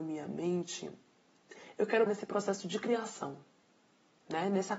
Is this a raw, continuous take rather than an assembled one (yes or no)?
no